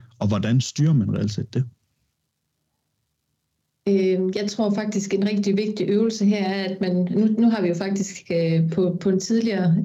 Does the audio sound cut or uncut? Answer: uncut